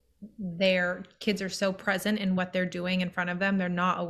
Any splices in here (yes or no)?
no